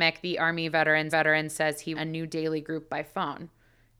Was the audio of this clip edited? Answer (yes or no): yes